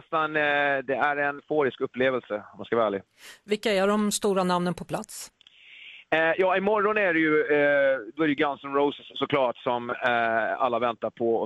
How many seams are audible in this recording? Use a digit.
1